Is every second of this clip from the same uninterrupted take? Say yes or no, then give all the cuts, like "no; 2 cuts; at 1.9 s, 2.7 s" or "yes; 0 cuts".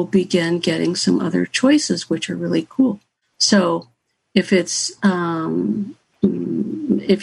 yes; 0 cuts